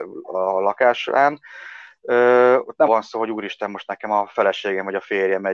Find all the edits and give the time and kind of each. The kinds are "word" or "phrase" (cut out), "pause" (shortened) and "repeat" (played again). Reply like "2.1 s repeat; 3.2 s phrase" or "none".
2.9 s word